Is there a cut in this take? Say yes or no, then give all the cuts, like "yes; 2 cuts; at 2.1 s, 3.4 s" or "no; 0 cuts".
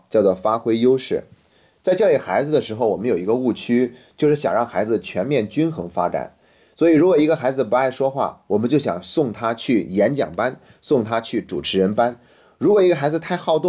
no; 0 cuts